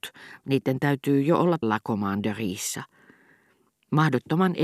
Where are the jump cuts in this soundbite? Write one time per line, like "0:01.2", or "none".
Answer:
0:01.6